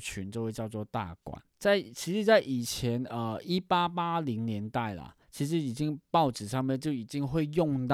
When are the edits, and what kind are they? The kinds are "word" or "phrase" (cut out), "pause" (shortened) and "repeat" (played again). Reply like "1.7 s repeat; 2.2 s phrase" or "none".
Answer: 1.5 s pause; 5.2 s pause